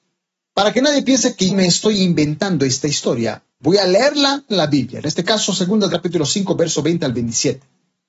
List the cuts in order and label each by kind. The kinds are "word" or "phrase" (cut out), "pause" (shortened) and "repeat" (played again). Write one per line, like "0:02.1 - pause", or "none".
0:01.5 - word
0:03.5 - pause
0:04.5 - phrase
0:05.9 - word